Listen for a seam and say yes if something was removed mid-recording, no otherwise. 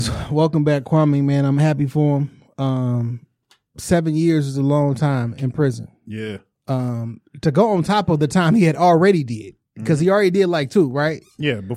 no